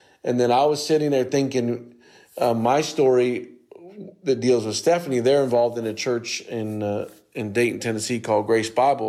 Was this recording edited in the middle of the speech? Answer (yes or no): no